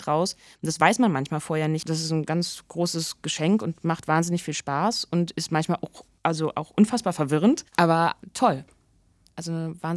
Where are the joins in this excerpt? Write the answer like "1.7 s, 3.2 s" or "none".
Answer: 7.7 s